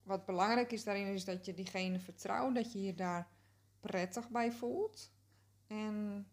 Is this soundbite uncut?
yes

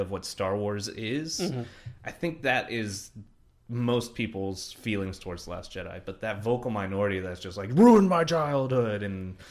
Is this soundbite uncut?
yes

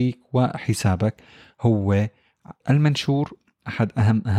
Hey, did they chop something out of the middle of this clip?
yes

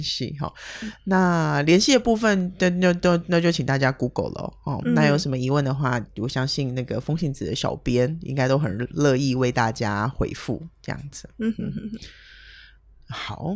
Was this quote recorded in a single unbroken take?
yes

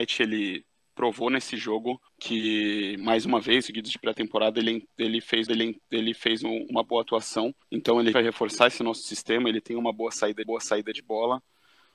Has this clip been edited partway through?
yes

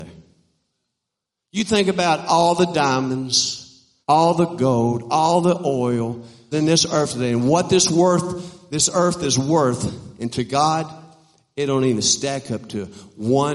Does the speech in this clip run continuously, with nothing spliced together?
no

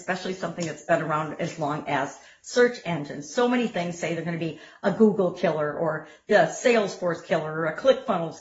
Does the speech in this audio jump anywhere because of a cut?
no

